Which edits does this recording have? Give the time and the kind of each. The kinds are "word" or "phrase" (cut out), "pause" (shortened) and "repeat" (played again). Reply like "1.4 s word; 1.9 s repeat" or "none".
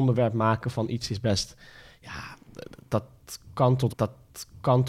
3.9 s repeat